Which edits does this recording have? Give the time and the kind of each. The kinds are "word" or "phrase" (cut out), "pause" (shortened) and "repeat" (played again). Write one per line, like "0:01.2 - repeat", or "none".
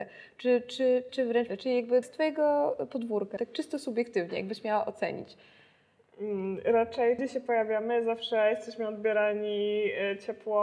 0:01.1 - word
0:01.5 - word
0:02.0 - word
0:03.4 - word
0:07.2 - word